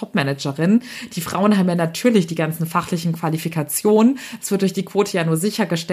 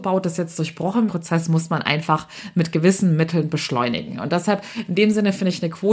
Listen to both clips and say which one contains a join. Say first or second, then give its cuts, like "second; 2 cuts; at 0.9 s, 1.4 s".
second; 1 cut; at 1.1 s